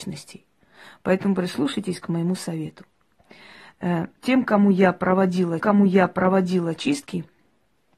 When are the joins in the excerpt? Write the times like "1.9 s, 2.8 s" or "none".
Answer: 4.2 s, 5.6 s